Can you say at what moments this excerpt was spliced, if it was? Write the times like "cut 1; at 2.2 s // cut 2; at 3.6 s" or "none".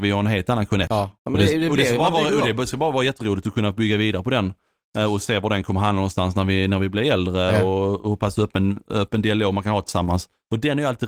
cut 1; at 1.2 s